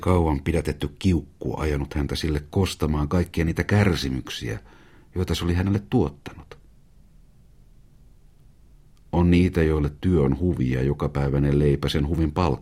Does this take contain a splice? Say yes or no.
no